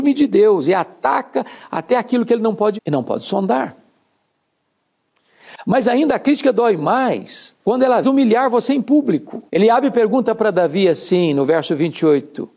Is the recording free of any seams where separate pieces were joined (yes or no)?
no